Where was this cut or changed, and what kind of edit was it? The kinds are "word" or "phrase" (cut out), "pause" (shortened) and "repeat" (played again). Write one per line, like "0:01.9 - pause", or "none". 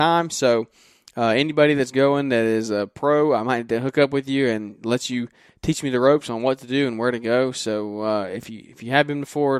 none